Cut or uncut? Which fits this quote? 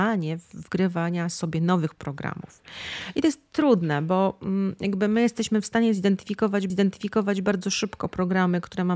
cut